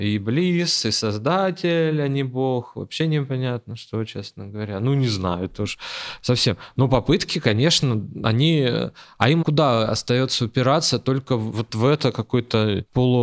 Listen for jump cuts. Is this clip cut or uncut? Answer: uncut